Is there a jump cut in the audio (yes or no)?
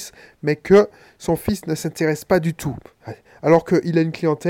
no